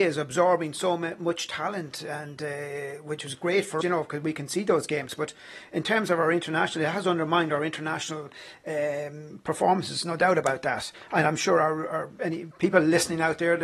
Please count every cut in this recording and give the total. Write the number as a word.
one